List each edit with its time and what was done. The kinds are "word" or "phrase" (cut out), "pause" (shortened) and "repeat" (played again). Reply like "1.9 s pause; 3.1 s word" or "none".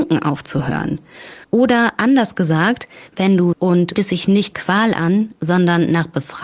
1.4 s pause; 3.1 s pause; 3.5 s phrase; 3.9 s phrase; 4.5 s word